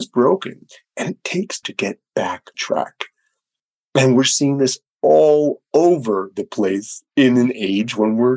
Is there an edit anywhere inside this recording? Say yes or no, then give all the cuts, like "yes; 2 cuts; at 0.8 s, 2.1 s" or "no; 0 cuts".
yes; 2 cuts; at 1.6 s, 2.5 s